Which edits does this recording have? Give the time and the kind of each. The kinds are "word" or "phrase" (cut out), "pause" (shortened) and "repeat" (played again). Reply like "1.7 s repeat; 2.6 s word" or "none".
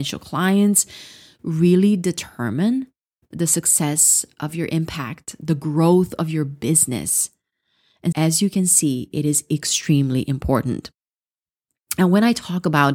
8.1 s word

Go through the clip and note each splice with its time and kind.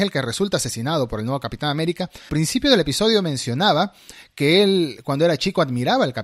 2.3 s word

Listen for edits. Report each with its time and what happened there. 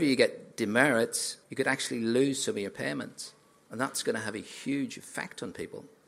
1.4 s pause

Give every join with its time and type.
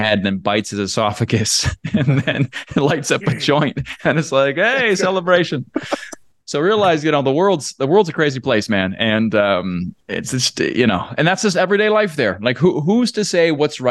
10.0 s pause

